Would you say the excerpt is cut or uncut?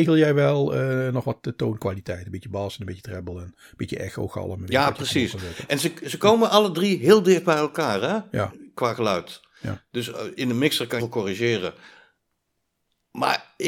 cut